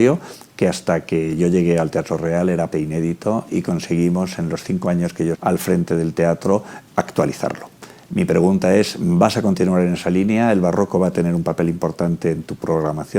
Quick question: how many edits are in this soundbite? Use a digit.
2